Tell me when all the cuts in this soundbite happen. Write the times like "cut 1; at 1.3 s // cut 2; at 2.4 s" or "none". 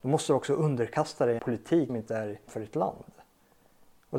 cut 1; at 1.4 s // cut 2; at 1.9 s // cut 3; at 2.5 s

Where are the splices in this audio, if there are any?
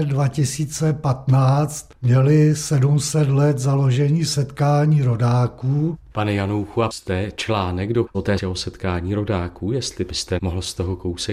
cut 1; at 1.9 s // cut 2; at 4.3 s // cut 3; at 6.9 s // cut 4; at 8.1 s // cut 5; at 8.4 s

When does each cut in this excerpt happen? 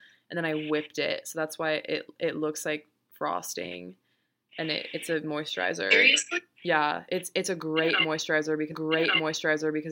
cut 1; at 8.7 s

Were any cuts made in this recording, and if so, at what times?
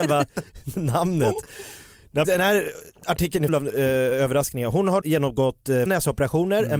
cut 1; at 2.2 s // cut 2; at 3.0 s // cut 3; at 3.5 s // cut 4; at 5.0 s // cut 5; at 5.9 s

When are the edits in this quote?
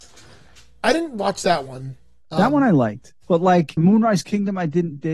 cut 1; at 3.2 s // cut 2; at 3.8 s

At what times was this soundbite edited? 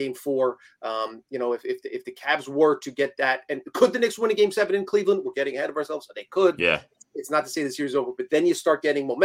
none

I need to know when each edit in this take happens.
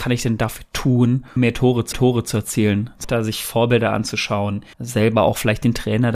cut 1; at 1.4 s // cut 2; at 1.9 s // cut 3; at 3.0 s // cut 4; at 4.7 s

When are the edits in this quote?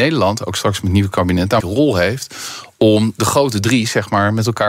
cut 1; at 1.6 s

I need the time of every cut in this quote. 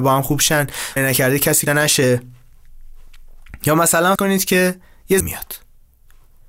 cut 1; at 1.0 s // cut 2; at 1.7 s // cut 3; at 4.2 s // cut 4; at 5.2 s

